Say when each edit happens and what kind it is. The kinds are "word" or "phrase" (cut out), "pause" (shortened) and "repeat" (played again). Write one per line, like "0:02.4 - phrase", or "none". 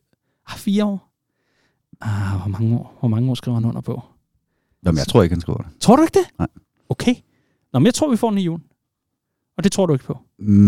none